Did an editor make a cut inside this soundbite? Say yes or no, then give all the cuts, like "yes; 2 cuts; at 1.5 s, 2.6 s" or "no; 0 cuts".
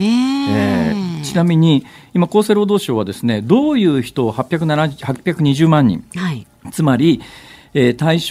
no; 0 cuts